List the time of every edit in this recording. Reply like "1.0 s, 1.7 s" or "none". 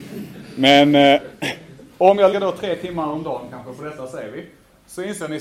2.3 s